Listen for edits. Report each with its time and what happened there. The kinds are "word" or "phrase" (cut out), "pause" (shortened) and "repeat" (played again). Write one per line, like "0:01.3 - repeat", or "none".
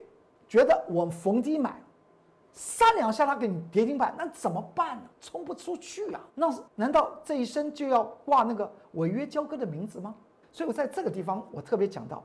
0:05.1 - pause
0:06.3 - pause
0:06.7 - pause
0:10.4 - pause